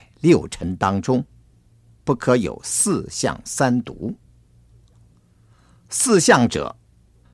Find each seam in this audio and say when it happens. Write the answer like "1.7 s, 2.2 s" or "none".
none